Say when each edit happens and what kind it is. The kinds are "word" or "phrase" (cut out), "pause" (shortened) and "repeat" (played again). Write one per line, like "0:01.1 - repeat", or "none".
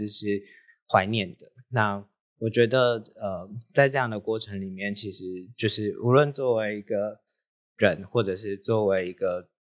none